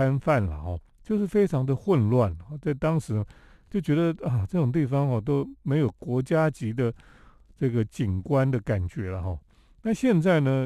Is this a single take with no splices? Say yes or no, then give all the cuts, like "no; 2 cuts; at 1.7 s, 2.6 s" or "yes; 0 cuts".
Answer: yes; 0 cuts